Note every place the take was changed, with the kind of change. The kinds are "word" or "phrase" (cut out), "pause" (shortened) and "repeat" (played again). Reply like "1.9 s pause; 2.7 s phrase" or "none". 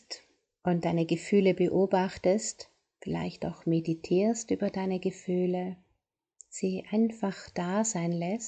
none